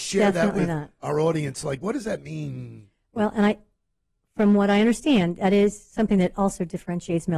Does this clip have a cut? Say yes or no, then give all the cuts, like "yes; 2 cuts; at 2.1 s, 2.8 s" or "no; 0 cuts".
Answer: no; 0 cuts